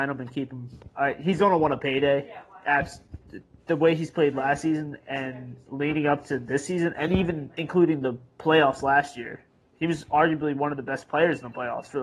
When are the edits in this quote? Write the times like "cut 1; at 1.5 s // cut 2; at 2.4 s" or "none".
none